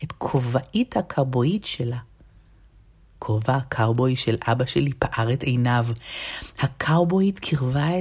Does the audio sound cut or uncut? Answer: uncut